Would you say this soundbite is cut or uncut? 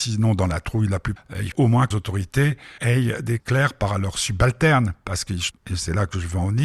cut